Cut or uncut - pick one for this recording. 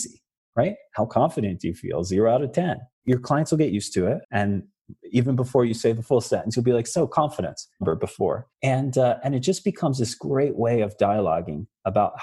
cut